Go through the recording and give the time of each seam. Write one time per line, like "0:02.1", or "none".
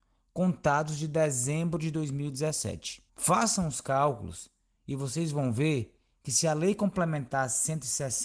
0:03.1